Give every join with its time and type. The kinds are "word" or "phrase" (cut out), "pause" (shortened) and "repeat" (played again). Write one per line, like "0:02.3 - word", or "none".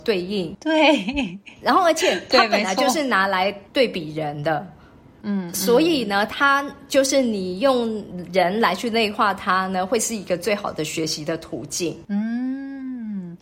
0:05.2 - word